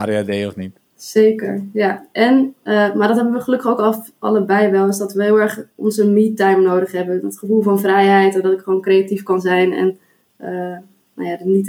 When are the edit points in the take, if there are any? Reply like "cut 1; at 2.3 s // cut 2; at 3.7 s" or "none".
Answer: none